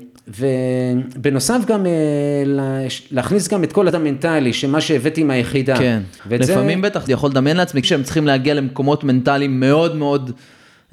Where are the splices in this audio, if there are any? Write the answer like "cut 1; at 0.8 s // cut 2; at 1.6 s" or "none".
cut 1; at 3.9 s // cut 2; at 6.2 s // cut 3; at 7.1 s // cut 4; at 7.8 s